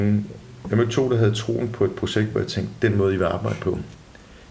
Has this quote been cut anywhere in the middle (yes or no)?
no